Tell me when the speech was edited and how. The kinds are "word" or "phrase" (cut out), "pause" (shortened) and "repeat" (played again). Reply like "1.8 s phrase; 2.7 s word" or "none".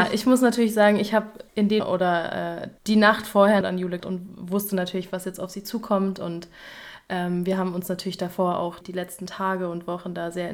1.5 s pause; 1.8 s word; 2.8 s pause; 3.6 s phrase; 4.0 s word; 8.8 s word